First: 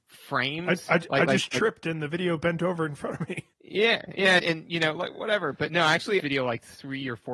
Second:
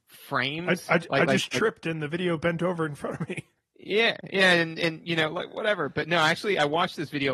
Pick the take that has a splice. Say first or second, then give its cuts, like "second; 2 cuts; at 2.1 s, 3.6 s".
first; 3 cuts; at 3.5 s, 4.4 s, 6.2 s